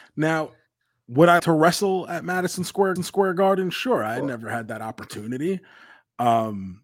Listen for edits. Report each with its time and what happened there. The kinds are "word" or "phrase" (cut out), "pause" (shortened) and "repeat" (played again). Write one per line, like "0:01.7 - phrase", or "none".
0:01.4 - word
0:03.0 - repeat